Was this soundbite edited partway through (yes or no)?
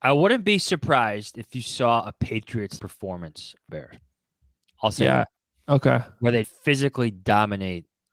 yes